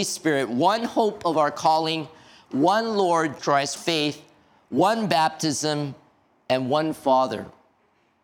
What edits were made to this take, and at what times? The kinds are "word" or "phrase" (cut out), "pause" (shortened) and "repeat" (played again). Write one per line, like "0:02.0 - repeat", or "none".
0:03.4 - word
0:03.8 - word